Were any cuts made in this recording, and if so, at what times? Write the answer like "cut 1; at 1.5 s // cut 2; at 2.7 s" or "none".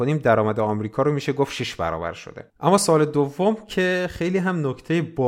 cut 1; at 2.5 s